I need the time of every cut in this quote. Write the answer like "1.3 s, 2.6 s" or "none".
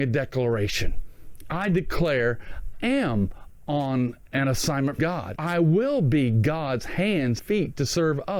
2.7 s, 5.0 s, 5.4 s, 7.4 s